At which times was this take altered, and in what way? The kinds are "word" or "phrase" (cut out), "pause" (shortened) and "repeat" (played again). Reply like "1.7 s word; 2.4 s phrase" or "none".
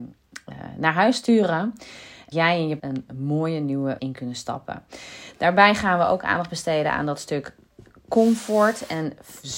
2.3 s word; 2.8 s word; 4.0 s word